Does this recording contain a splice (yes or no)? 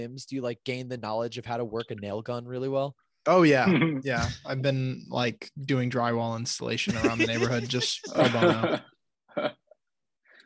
no